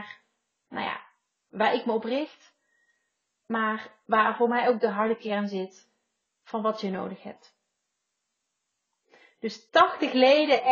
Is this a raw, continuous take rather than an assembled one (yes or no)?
yes